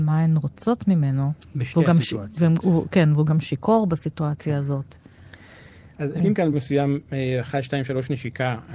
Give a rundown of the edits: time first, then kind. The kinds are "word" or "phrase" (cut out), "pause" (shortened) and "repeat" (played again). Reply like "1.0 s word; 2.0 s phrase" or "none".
6.2 s word; 6.5 s word